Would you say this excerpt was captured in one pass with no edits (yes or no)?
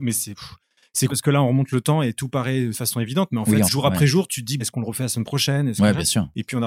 no